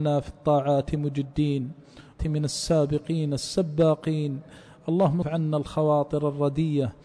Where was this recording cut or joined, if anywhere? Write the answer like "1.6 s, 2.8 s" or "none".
2.2 s, 5.2 s